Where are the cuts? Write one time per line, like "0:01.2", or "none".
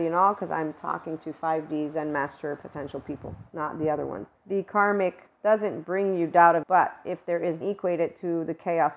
0:04.3
0:05.3
0:06.6
0:07.6